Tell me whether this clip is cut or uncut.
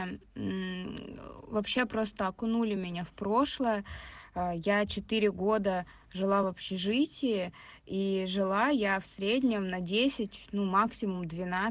uncut